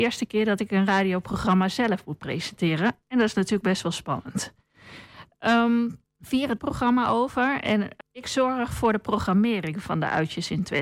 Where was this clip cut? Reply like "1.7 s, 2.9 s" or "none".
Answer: 6.1 s, 6.6 s, 8.0 s